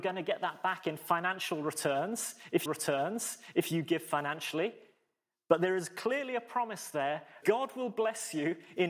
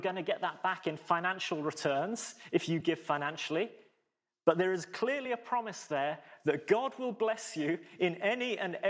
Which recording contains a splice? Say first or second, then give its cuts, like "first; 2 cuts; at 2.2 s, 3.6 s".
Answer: first; 2 cuts; at 2.7 s, 7.4 s